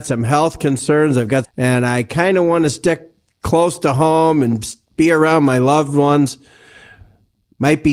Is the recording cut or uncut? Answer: cut